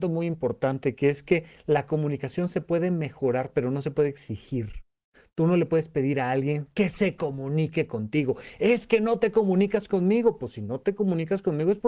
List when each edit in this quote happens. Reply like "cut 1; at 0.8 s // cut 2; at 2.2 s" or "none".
none